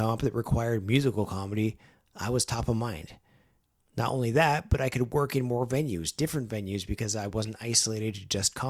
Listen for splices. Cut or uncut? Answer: uncut